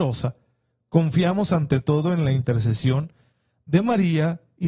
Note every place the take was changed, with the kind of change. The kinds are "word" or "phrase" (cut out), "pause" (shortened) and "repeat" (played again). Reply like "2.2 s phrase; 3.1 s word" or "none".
none